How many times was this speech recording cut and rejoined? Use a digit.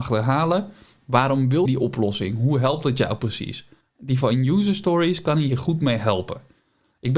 2